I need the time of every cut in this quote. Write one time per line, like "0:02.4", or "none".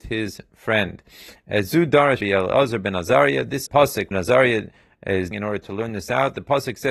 0:02.2
0:03.7
0:04.1
0:05.3